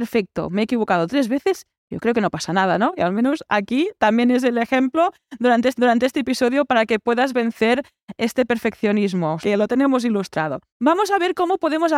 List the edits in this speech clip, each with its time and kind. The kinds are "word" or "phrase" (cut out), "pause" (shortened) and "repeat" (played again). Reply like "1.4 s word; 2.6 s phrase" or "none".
5.7 s repeat; 9.4 s word; 10.7 s pause